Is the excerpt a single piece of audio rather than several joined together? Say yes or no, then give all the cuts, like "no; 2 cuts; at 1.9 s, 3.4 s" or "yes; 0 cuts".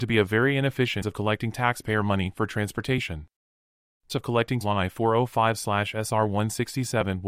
no; 3 cuts; at 1.0 s, 4.1 s, 4.6 s